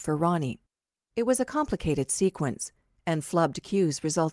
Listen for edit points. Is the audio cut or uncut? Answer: uncut